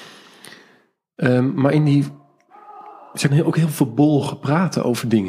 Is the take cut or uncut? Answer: cut